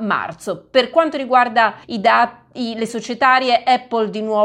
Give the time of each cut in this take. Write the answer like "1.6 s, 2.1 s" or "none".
1.8 s, 2.9 s